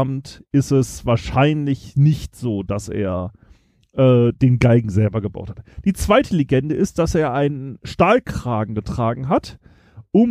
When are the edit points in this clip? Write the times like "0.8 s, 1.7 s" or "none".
none